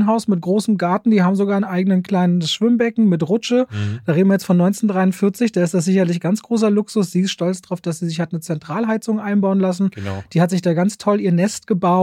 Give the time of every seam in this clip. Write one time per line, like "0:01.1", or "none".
none